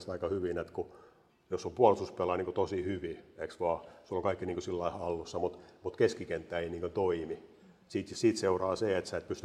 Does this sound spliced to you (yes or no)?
no